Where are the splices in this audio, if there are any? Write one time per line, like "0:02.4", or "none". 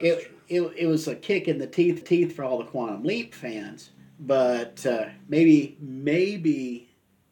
0:02.0
0:04.0